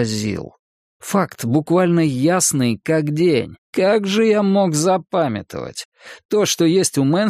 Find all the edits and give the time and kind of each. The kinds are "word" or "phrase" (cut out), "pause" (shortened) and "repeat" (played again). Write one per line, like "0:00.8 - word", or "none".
0:03.6 - pause